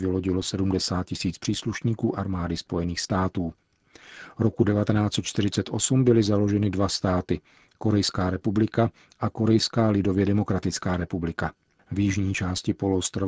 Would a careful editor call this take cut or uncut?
uncut